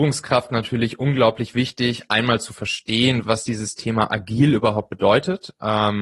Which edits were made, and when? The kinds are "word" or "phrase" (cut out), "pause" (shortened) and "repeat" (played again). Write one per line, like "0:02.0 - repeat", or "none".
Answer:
0:03.2 - word